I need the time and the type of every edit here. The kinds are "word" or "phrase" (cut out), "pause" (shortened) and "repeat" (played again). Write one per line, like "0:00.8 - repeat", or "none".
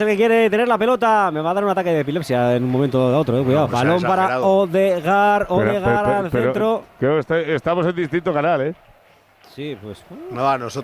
0:03.7 - word